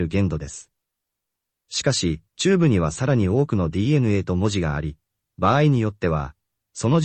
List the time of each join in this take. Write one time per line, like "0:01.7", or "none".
0:02.3